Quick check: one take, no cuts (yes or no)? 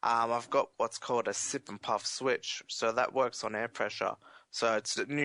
yes